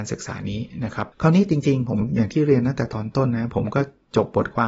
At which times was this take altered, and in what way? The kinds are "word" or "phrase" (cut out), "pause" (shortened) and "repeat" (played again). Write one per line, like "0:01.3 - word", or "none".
0:01.1 - pause